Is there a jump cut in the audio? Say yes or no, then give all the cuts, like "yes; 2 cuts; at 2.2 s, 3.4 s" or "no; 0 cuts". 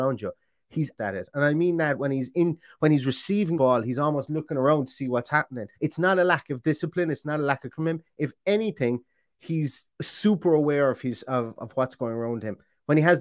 yes; 6 cuts; at 1.0 s, 3.5 s, 5.7 s, 7.7 s, 9.9 s, 11.6 s